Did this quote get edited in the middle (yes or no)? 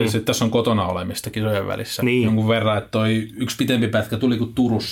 no